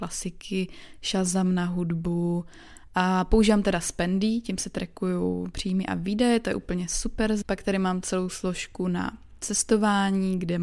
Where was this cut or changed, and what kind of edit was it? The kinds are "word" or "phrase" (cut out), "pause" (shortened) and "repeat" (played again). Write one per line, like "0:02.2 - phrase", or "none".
0:07.4 - word